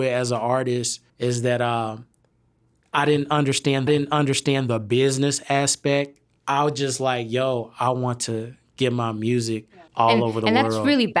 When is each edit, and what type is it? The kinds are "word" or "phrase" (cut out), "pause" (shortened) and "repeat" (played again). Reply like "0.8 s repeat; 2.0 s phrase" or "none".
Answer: 1.1 s pause; 3.9 s repeat; 9.9 s pause